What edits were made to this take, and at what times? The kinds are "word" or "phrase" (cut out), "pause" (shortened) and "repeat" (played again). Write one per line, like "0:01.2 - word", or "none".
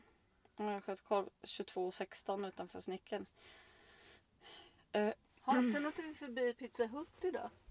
none